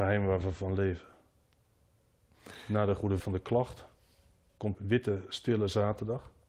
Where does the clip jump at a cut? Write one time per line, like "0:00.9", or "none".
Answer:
0:03.2
0:04.7